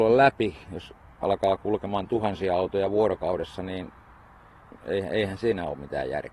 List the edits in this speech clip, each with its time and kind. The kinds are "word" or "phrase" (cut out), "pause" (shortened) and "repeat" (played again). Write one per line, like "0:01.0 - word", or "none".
0:04.8 - pause

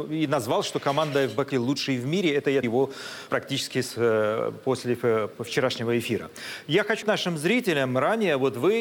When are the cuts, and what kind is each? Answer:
0:01.5 - word
0:02.6 - word
0:03.3 - word
0:07.0 - word

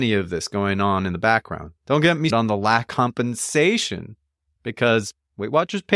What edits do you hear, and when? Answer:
0:01.8 - pause
0:02.3 - word
0:02.9 - word

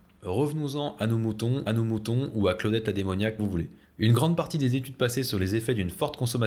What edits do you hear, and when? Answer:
0:01.7 - repeat
0:03.4 - word
0:03.8 - pause

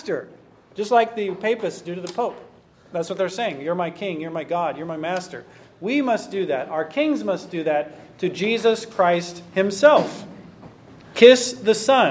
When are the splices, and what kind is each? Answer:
none

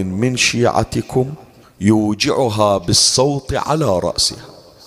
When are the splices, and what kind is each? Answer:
0:01.6 - pause

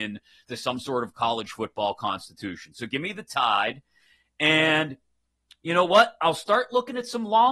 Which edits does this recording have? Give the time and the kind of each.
none

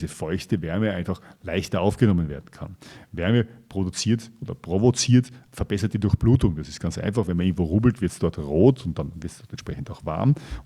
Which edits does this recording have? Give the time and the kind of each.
0:05.4 - word

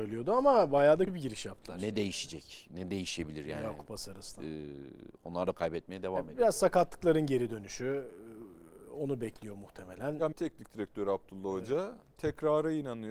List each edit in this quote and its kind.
0:01.1 - word
0:05.5 - word
0:10.3 - word

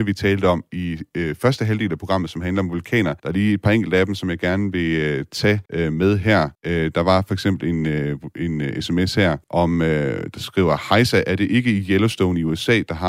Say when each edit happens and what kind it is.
0:03.2 - pause
0:05.7 - pause
0:06.5 - pause
0:09.4 - pause

